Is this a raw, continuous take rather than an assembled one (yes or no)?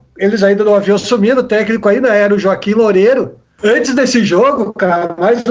yes